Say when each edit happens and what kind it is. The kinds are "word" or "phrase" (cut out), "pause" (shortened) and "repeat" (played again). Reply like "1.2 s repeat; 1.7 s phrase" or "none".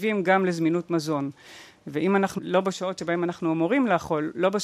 2.4 s word